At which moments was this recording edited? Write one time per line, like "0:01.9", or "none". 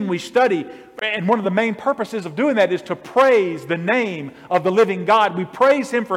none